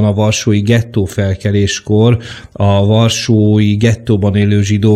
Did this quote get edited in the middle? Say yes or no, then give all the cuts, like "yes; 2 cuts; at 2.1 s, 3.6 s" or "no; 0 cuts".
no; 0 cuts